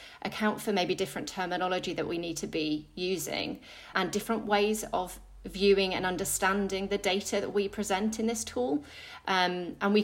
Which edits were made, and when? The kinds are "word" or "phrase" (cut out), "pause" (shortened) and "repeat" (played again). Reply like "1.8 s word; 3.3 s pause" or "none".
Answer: 3.9 s word